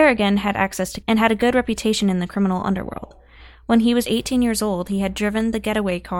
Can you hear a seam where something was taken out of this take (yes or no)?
yes